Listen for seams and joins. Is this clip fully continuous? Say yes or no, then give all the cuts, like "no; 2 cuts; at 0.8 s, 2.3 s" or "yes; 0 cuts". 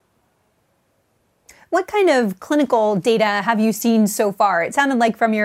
yes; 0 cuts